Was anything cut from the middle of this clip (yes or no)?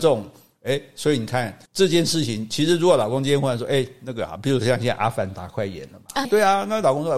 yes